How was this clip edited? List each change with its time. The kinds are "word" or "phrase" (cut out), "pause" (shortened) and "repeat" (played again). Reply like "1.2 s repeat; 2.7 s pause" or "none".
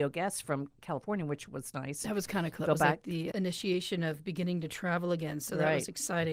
2.6 s word; 3.3 s word

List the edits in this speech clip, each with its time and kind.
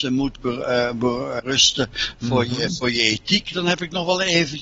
1.4 s word

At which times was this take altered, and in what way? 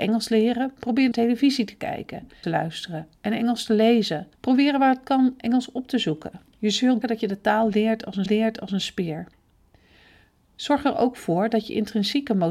1.1 s phrase; 2.4 s phrase; 4.3 s pause; 6.5 s pause; 7.0 s word; 8.3 s repeat

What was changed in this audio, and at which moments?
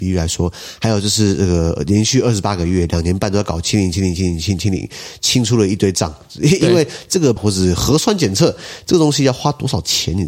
7.4 s word

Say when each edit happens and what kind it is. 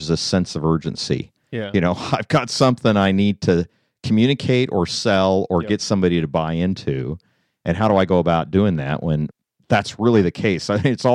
none

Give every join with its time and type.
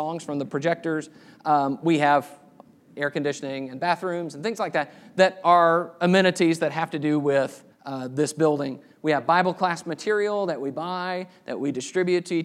7.7 s pause

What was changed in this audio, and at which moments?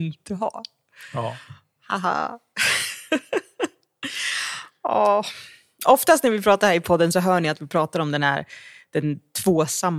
none

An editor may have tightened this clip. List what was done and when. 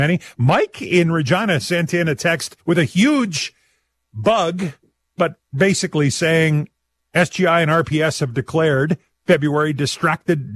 2.6 s pause

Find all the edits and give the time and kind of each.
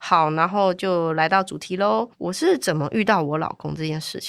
2.1 s pause

